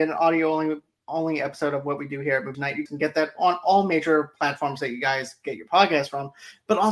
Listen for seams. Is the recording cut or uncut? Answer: cut